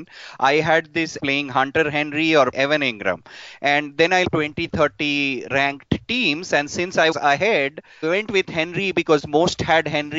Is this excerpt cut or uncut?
cut